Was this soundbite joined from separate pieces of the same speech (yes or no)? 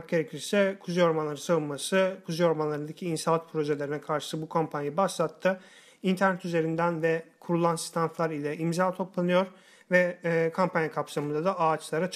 no